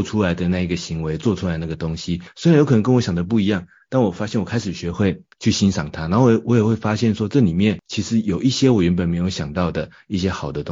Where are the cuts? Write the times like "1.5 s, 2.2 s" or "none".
5.3 s